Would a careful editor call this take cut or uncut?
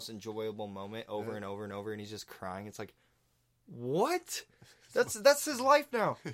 uncut